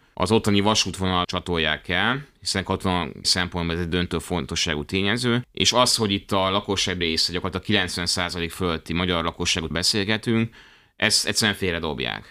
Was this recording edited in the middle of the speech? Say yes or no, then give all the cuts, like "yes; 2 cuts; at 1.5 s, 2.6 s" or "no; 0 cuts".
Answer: yes; 4 cuts; at 1.2 s, 3.2 s, 7.0 s, 9.7 s